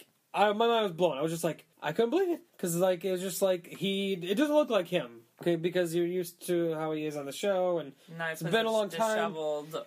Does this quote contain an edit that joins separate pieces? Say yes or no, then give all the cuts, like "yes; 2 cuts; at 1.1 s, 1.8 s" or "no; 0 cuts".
yes; 2 cuts; at 1.7 s, 2.5 s